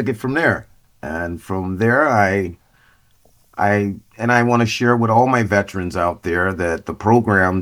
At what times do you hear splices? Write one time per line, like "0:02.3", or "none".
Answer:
none